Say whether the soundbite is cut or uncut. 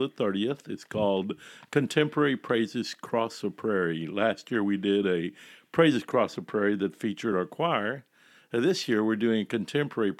uncut